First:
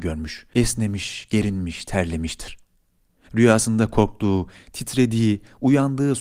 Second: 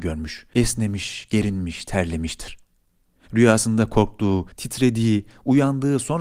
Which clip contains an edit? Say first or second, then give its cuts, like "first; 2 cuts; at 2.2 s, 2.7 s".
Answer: second; 1 cut; at 4.5 s